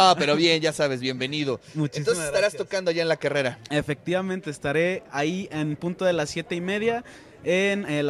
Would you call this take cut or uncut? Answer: uncut